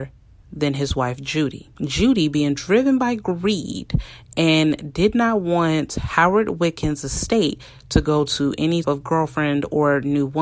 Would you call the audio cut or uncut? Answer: cut